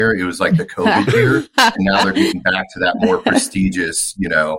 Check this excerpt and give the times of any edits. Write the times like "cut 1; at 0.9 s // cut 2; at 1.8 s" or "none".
none